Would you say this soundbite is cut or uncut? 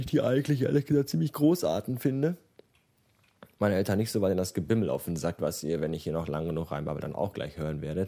cut